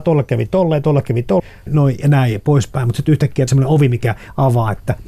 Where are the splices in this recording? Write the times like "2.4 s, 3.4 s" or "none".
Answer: 1.4 s, 3.5 s